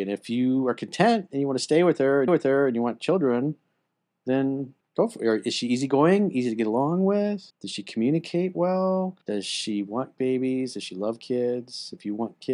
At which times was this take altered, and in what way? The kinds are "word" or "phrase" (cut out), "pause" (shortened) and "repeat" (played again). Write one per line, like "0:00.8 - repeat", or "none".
0:02.3 - repeat
0:04.8 - pause
0:07.5 - pause
0:09.2 - pause